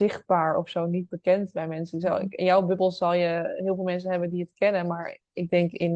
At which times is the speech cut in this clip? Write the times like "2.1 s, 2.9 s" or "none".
none